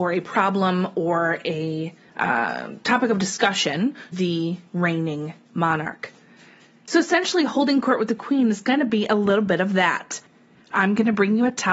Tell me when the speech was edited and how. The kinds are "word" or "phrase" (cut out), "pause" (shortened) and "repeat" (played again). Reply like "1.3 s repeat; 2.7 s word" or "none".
2.1 s pause; 4.1 s word; 4.7 s pause